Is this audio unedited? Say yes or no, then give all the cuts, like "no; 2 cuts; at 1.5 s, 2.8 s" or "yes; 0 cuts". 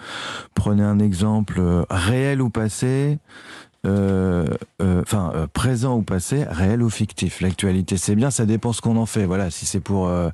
yes; 0 cuts